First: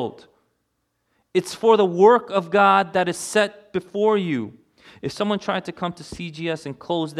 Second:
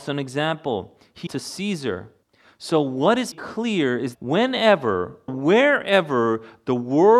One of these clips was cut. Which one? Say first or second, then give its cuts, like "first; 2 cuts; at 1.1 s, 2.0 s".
second; 5 cuts; at 1.3 s, 2.2 s, 3.3 s, 4.1 s, 5.3 s